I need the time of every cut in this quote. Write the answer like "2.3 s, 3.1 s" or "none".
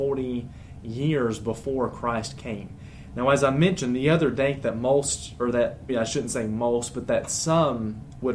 5.9 s

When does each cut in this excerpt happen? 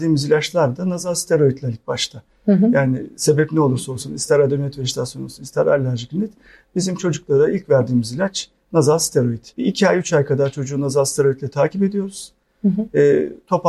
9.5 s

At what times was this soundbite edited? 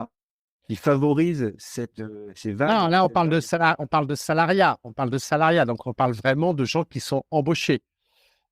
none

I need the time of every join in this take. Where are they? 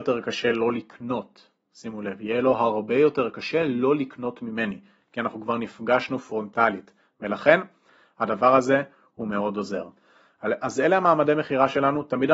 none

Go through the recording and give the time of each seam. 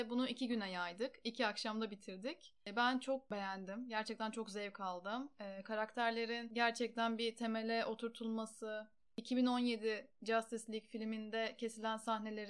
none

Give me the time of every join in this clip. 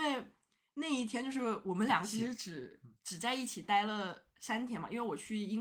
2.9 s

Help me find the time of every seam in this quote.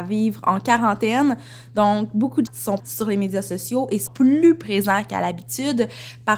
2.5 s, 2.8 s, 4.1 s

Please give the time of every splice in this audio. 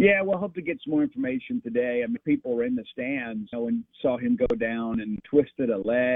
2.2 s, 3.5 s, 5.2 s

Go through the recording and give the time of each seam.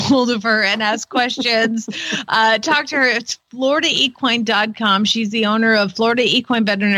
none

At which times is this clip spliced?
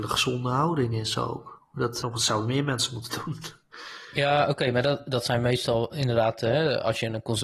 2.0 s

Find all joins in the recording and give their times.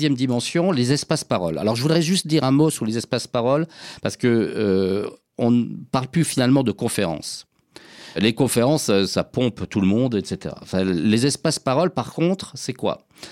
none

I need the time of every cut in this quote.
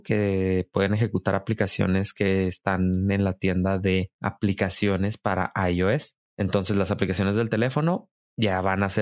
6.3 s

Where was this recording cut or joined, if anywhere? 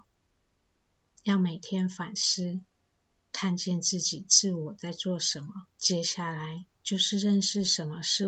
2.8 s, 5.7 s, 6.7 s

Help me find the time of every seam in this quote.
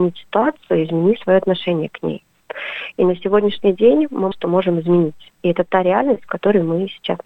4.3 s

